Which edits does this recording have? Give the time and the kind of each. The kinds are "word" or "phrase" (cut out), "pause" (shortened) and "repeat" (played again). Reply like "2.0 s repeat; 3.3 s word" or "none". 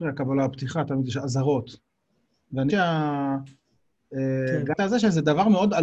2.7 s word; 4.8 s word